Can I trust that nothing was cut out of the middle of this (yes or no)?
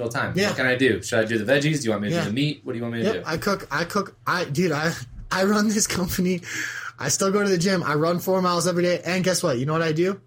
yes